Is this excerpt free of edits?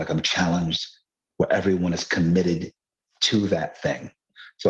yes; 0 cuts

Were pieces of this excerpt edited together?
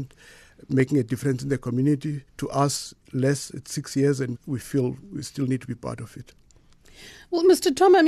yes; 3 cuts; at 2.3 s, 3.0 s, 4.4 s

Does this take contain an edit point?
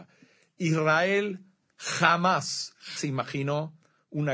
yes; 1 cut; at 3.0 s

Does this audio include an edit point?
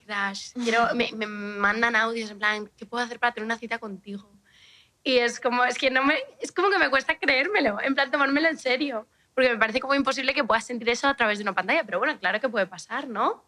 no; 0 cuts

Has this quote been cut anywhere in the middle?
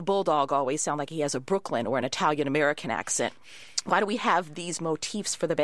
no; 0 cuts

